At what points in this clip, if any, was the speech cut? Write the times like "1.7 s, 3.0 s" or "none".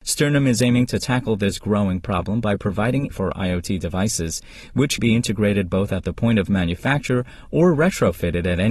3.1 s, 5.0 s